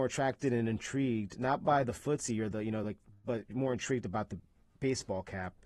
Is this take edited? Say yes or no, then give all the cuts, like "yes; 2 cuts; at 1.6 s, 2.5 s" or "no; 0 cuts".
no; 0 cuts